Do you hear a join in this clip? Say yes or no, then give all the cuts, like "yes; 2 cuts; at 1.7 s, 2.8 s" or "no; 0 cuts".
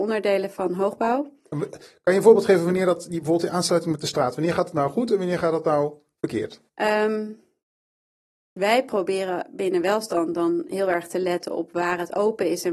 no; 0 cuts